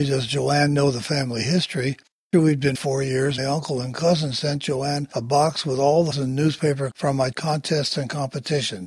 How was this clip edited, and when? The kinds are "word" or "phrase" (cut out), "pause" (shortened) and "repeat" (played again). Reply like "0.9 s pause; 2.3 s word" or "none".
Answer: 2.3 s word; 2.7 s word; 3.4 s word; 6.1 s word; 6.9 s word; 7.3 s word